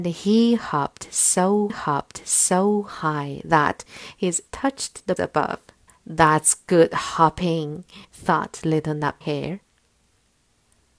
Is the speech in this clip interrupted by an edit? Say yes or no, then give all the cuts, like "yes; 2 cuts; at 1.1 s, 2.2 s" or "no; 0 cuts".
yes; 6 cuts; at 1.7 s, 4.5 s, 5.2 s, 5.9 s, 8.0 s, 9.2 s